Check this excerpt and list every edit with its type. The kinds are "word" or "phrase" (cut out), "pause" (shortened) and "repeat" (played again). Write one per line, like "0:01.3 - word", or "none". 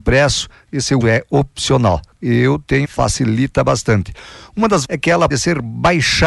0:01.0 - word
0:02.8 - word
0:04.8 - word
0:05.3 - word